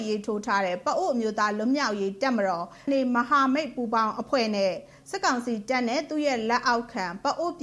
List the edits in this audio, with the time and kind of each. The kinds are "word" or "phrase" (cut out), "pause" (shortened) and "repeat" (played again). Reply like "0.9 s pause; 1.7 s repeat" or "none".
2.9 s word